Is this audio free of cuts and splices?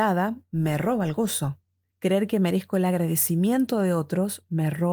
yes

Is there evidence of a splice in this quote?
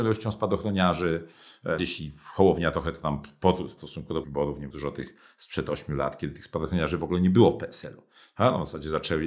yes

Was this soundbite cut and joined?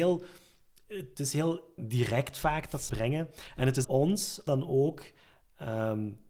yes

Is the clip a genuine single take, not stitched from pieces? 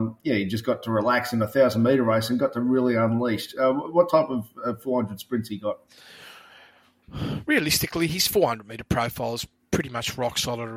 yes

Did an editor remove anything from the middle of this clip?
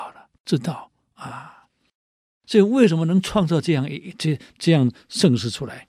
no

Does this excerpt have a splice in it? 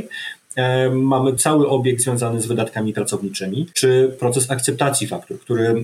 no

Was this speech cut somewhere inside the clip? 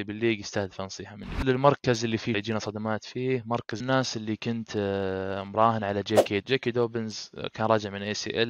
yes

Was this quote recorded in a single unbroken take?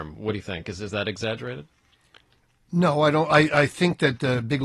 yes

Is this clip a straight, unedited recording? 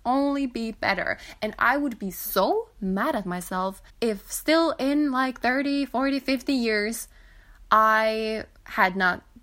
no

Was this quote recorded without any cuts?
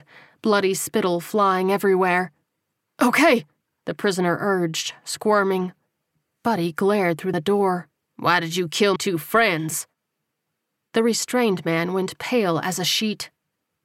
no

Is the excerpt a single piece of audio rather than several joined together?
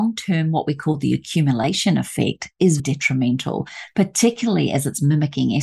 no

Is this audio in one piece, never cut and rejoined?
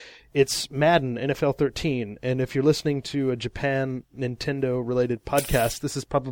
yes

